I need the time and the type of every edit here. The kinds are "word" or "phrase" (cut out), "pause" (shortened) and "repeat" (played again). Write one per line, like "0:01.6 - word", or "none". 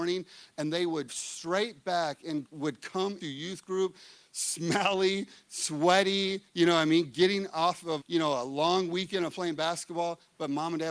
0:01.1 - word
0:02.4 - word
0:03.2 - word
0:08.0 - word